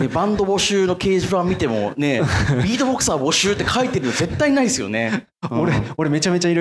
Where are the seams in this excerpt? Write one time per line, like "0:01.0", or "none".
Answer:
none